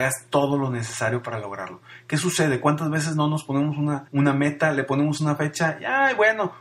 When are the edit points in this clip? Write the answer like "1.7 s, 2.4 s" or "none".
4.1 s